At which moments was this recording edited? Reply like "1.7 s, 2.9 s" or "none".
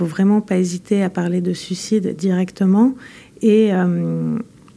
none